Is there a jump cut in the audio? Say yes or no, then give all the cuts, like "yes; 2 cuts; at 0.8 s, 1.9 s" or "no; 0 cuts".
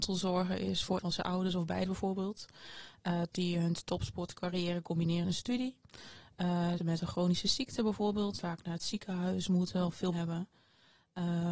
yes; 7 cuts; at 1.0 s, 1.9 s, 3.3 s, 5.2 s, 6.8 s, 8.4 s, 10.1 s